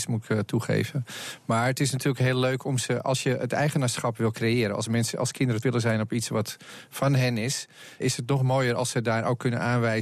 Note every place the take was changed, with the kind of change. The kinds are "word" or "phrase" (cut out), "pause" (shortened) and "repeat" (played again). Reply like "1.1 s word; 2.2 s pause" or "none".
5.6 s word; 8.0 s word